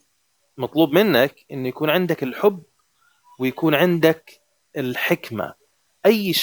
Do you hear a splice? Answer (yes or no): no